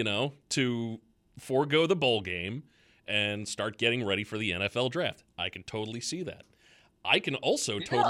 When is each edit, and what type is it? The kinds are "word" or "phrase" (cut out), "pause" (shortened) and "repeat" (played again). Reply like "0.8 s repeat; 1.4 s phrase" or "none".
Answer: none